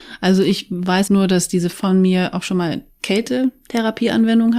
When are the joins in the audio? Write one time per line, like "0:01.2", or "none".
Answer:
0:01.1
0:01.7